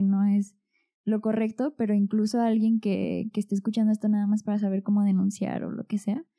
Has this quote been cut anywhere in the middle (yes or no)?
no